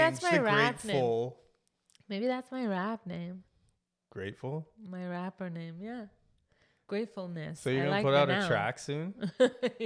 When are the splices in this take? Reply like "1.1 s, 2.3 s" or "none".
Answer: none